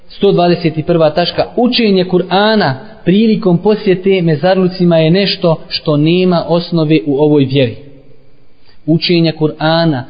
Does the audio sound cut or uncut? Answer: uncut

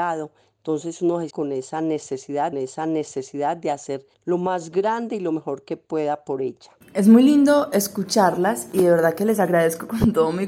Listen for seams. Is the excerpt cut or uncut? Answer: cut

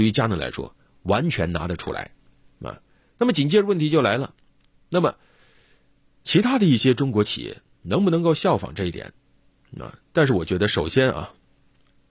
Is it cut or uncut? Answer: uncut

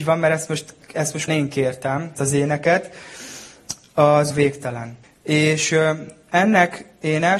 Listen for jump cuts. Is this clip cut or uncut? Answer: cut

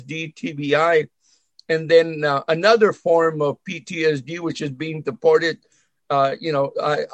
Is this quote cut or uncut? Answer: uncut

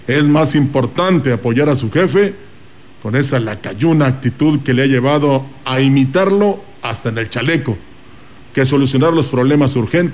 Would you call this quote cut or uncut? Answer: uncut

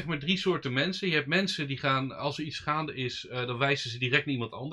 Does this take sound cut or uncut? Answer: uncut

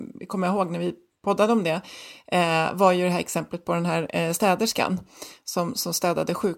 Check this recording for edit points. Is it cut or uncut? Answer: uncut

